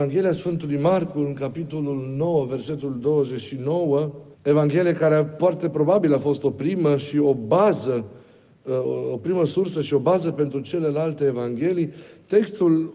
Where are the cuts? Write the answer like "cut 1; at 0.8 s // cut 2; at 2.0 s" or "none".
cut 1; at 4.3 s